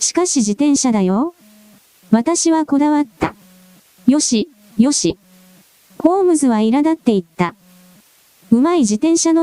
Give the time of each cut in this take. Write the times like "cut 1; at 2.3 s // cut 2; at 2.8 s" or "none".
none